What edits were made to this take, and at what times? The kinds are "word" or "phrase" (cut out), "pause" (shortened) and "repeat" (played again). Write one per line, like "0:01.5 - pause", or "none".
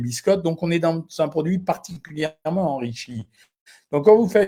none